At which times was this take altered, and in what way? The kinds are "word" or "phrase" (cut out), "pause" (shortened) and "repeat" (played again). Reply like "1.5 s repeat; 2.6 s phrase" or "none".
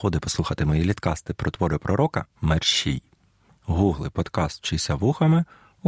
2.3 s pause